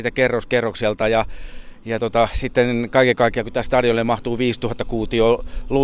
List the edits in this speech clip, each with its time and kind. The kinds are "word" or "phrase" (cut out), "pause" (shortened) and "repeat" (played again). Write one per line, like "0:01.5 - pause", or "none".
none